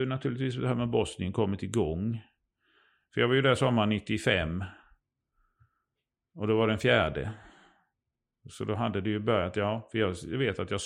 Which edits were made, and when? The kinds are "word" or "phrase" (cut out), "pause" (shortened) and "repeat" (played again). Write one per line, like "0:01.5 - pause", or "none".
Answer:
none